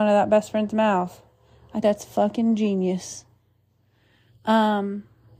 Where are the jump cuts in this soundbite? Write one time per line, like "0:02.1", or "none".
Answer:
0:01.8